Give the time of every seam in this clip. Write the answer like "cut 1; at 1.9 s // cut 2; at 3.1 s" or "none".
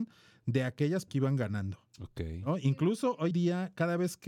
cut 1; at 1.1 s // cut 2; at 3.3 s